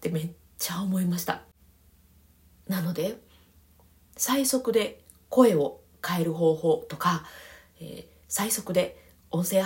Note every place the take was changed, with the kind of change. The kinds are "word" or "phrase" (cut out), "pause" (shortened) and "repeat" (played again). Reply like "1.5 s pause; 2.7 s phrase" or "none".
none

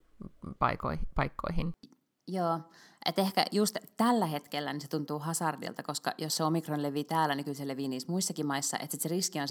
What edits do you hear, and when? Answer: none

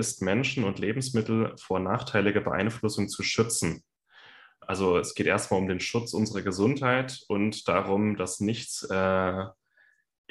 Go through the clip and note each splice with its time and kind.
none

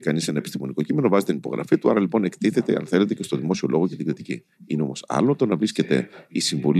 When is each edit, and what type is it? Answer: none

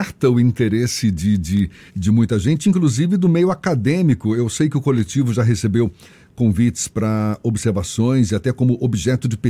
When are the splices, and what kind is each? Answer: 1.9 s pause

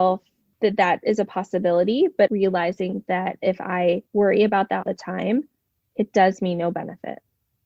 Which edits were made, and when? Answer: 2.3 s word; 4.1 s pause; 4.8 s word; 5.8 s pause

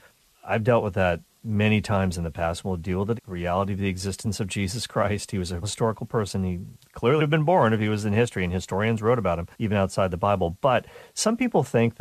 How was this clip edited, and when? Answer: 3.2 s word; 5.6 s word; 7.2 s word; 9.5 s pause

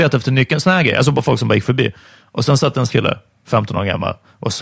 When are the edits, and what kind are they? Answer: 2.9 s word

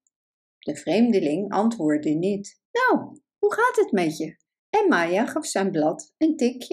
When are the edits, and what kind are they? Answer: 2.7 s pause; 4.5 s pause

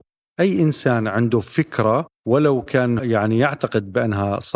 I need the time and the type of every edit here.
2.2 s pause; 3.0 s word

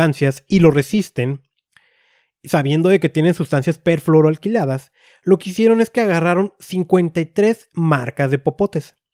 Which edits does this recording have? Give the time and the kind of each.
none

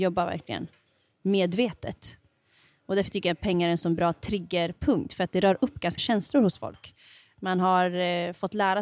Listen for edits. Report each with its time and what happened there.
6.0 s word

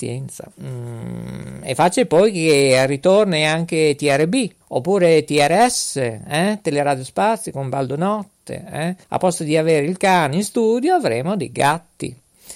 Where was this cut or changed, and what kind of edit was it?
4.6 s pause; 9.0 s pause

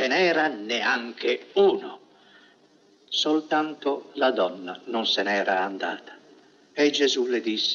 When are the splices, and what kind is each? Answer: none

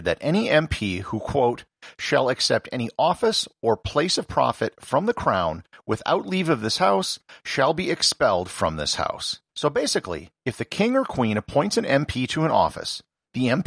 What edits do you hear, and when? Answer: 9.5 s pause; 10.4 s pause

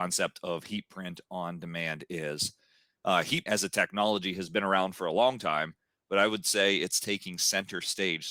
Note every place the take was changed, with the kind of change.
3.5 s word

